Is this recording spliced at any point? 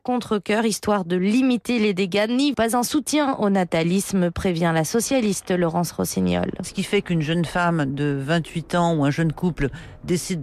yes; 1 cut; at 2.5 s

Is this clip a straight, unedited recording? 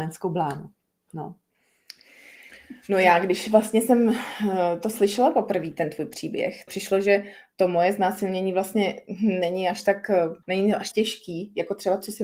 no; 3 cuts; at 6.7 s, 10.4 s, 10.9 s

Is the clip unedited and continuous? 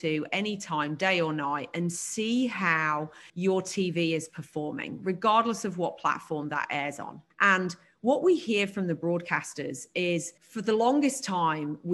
no; 3 cuts; at 3.3 s, 7.3 s, 10.4 s

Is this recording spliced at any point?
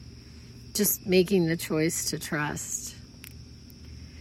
no; 0 cuts

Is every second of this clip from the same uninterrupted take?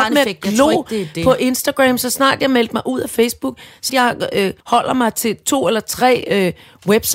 no; 2 cuts; at 3.9 s, 4.6 s

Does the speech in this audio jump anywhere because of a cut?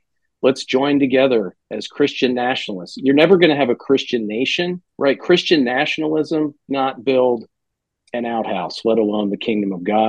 yes; 4 cuts; at 1.6 s, 4.9 s, 6.7 s, 8.0 s

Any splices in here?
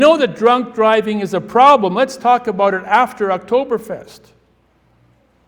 no; 0 cuts

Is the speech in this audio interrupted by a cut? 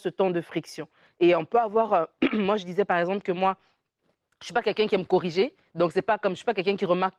no; 0 cuts

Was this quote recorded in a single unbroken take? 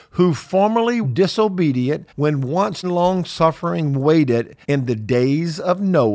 no; 4 cuts; at 1.0 s, 2.1 s, 2.8 s, 4.6 s

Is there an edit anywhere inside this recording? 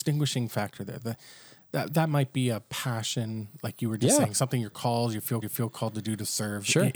yes; 1 cut; at 5.4 s

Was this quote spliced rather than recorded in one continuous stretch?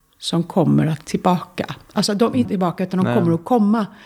yes; 2 cuts; at 1.0 s, 2.4 s

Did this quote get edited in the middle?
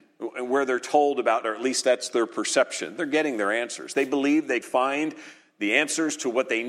yes; 2 cuts; at 1.4 s, 4.6 s

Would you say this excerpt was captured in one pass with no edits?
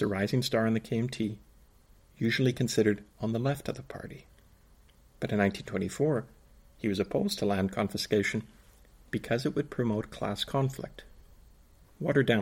yes; 0 cuts

